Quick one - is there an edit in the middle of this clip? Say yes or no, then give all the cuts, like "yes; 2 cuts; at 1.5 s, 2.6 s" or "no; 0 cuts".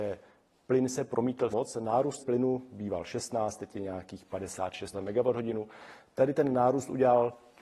yes; 3 cuts; at 1.5 s, 2.2 s, 4.9 s